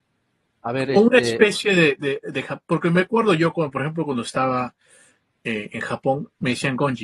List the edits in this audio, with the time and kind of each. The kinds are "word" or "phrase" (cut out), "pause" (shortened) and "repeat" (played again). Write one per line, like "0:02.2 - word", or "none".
none